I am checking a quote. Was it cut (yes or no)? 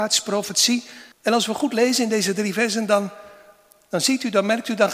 yes